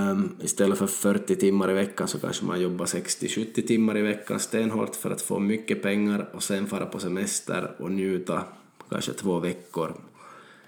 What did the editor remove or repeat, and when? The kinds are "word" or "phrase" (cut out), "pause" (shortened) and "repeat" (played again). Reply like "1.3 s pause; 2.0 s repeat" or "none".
none

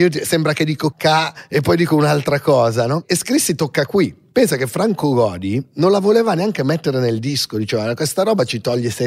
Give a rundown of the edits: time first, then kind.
0.9 s word

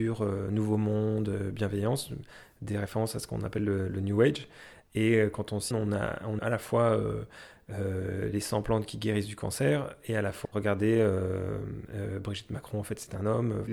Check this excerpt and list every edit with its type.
5.7 s word; 6.4 s phrase; 10.4 s word

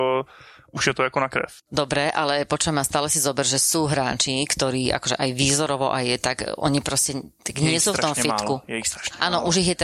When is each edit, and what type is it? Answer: 1.6 s pause

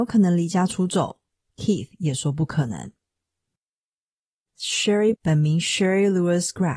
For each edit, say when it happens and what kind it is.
5.2 s word

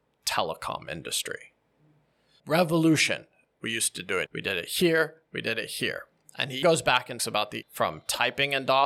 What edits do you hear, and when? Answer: 4.3 s word; 6.6 s word; 7.2 s word; 7.6 s word

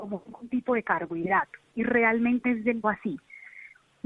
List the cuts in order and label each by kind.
2.4 s word; 2.8 s word

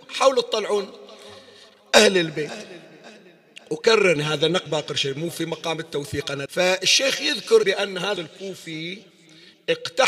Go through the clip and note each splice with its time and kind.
4.2 s word; 4.7 s word; 6.5 s word; 7.6 s word; 8.2 s word

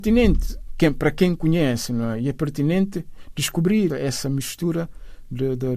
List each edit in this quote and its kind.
3.9 s word

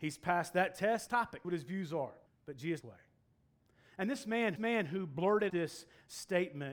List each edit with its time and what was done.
1.1 s word; 1.4 s phrase; 2.3 s pause; 2.8 s phrase; 4.6 s repeat; 5.5 s word

